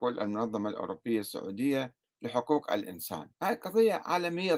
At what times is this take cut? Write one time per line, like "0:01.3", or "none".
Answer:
0:02.0
0:03.3